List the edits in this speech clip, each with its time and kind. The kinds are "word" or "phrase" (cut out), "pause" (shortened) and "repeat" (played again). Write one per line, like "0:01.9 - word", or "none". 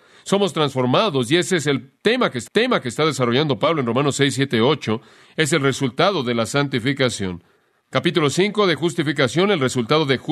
0:02.5 - repeat